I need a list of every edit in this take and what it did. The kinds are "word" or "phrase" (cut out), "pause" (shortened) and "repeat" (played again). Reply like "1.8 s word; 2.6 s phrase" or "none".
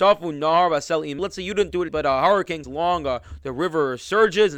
1.2 s word; 1.9 s word; 2.6 s word